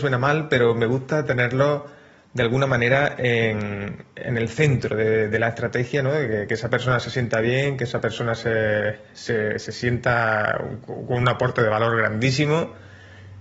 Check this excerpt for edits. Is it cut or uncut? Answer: uncut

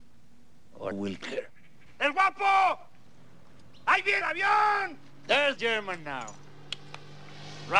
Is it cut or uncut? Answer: cut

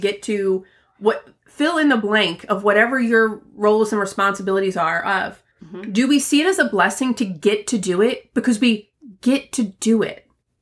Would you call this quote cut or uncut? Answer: cut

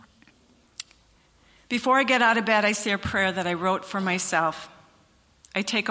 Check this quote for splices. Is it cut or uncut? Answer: uncut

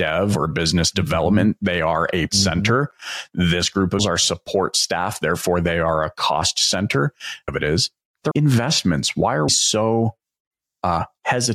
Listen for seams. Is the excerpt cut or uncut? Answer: cut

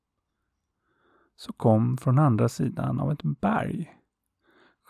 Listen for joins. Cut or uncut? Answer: uncut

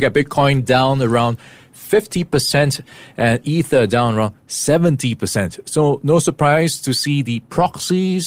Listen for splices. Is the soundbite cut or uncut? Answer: uncut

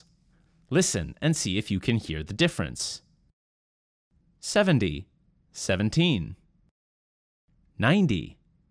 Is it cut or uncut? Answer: uncut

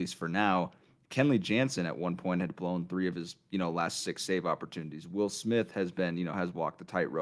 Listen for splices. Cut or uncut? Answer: uncut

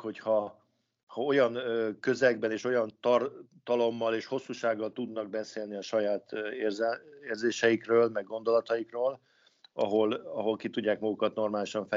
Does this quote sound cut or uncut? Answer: uncut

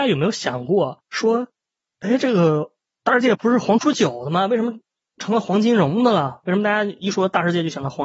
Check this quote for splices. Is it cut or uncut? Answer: cut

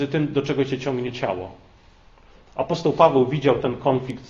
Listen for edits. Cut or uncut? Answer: uncut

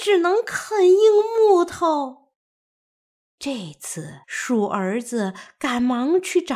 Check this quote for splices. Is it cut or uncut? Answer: cut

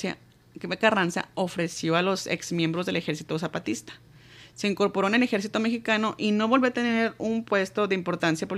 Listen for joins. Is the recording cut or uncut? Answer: uncut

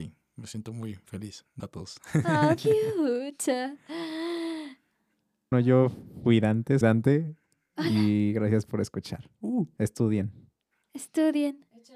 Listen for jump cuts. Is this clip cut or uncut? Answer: cut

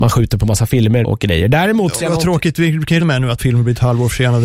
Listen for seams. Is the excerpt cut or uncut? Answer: cut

